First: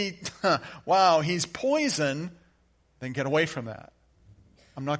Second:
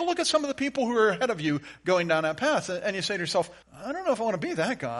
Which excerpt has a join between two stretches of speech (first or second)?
second